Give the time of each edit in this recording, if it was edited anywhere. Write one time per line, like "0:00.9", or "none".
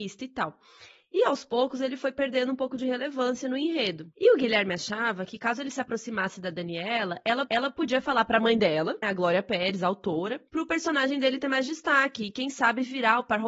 0:07.5
0:09.0